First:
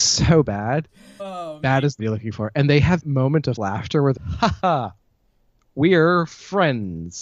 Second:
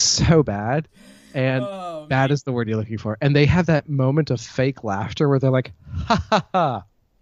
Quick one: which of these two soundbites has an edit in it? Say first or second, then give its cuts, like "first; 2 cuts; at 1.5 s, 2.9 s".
first; 6 cuts; at 1.2 s, 2.0 s, 3.0 s, 3.6 s, 4.2 s, 4.6 s